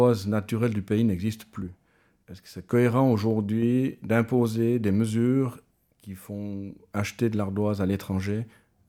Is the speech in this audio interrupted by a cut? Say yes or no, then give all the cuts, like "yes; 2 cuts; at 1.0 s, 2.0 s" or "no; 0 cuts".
no; 0 cuts